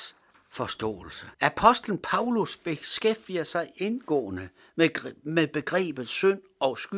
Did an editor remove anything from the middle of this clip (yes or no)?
yes